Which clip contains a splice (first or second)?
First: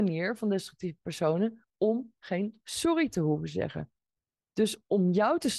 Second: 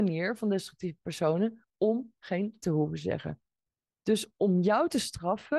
second